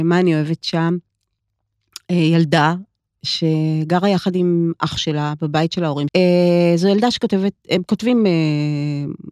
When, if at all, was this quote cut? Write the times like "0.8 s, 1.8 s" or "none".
6.1 s